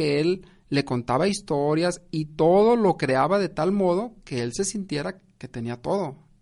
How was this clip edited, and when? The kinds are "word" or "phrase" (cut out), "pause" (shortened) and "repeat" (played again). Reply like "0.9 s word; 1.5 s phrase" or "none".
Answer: none